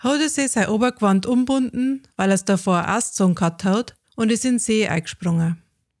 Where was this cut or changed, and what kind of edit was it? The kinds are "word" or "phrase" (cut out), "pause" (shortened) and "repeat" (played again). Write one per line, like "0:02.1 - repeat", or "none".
none